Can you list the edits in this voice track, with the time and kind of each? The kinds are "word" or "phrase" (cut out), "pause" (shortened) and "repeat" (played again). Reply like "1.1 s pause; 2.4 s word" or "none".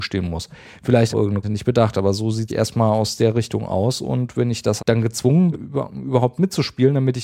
1.1 s phrase; 1.4 s word; 2.5 s phrase; 4.8 s word; 5.5 s word